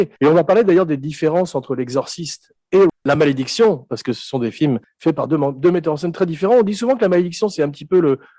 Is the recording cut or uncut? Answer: uncut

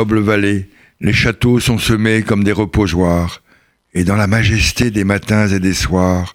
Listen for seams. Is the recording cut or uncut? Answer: uncut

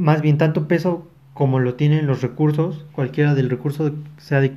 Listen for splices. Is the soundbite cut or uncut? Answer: uncut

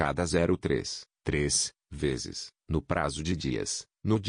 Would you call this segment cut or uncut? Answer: uncut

